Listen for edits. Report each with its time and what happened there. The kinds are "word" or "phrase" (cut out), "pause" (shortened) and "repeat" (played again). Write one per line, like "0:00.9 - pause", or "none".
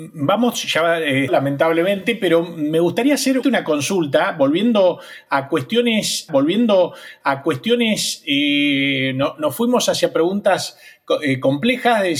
0:01.3 - phrase
0:03.4 - phrase
0:06.3 - repeat